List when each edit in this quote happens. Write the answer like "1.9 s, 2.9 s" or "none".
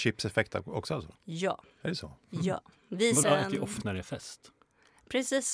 1.1 s, 3.2 s, 3.8 s